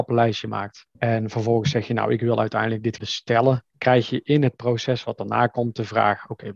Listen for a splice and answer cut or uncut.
cut